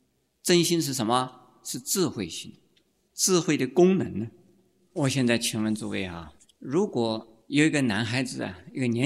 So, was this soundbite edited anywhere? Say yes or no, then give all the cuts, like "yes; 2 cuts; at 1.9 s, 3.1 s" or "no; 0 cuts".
yes; 2 cuts; at 6.4 s, 7.4 s